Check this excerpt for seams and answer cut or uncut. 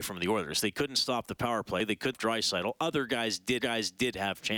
cut